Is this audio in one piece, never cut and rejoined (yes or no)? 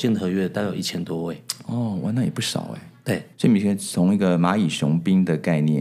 no